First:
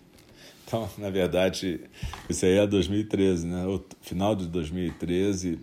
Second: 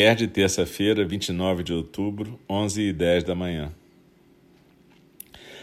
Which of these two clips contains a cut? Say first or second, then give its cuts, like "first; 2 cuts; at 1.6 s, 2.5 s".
first; 1 cut; at 2.3 s